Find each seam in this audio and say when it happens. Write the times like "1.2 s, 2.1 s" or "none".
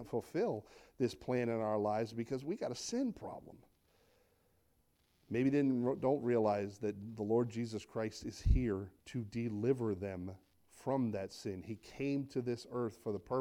9.0 s